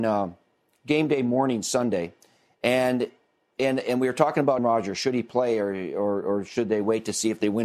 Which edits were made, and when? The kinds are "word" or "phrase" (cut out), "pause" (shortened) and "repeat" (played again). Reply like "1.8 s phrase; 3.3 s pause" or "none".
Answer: 4.6 s word